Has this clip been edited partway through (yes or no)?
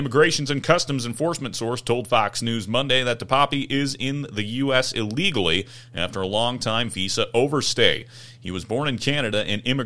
no